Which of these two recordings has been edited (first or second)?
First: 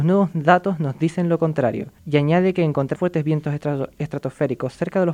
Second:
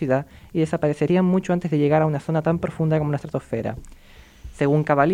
first